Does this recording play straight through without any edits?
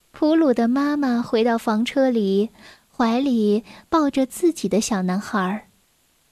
yes; 0 cuts

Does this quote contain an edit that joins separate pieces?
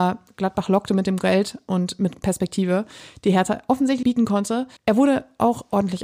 yes; 2 cuts; at 4.0 s, 4.8 s

